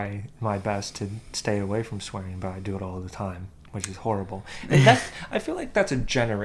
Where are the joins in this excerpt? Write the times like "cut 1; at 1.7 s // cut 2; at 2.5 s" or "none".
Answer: none